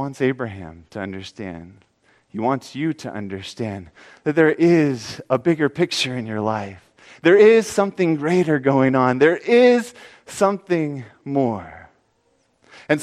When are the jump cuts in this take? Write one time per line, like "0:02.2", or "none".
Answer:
none